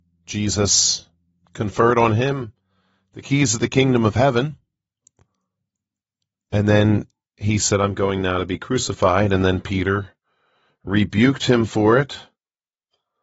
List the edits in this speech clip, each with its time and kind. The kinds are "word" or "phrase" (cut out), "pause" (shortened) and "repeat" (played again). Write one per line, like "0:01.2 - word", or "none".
none